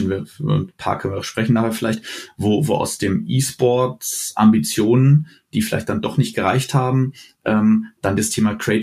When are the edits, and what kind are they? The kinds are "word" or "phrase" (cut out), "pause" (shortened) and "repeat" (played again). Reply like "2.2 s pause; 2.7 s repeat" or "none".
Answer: none